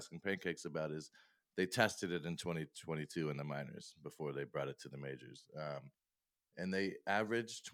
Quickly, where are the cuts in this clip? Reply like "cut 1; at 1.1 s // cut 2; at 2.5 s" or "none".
none